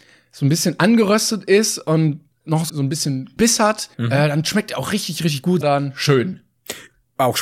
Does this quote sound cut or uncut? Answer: cut